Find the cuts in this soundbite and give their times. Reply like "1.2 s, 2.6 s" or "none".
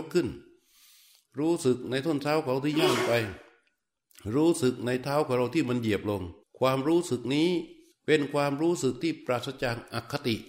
6.4 s, 7.9 s